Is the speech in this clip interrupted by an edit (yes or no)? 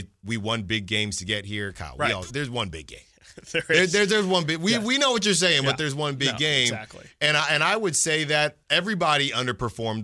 yes